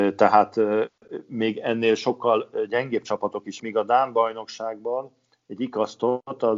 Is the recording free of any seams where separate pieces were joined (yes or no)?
no